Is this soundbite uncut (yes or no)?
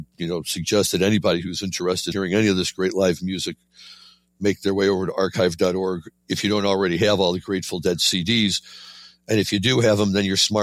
no